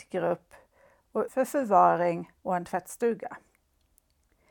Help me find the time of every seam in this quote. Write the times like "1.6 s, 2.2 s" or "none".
1.3 s, 2.4 s